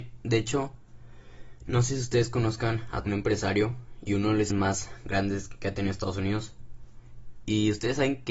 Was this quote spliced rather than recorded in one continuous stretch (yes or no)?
yes